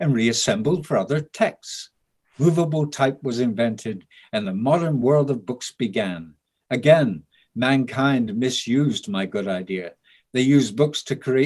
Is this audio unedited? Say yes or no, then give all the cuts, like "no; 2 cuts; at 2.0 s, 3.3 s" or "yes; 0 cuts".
yes; 0 cuts